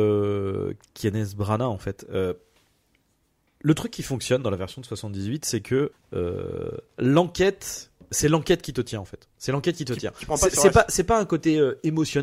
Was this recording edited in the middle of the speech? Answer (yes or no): yes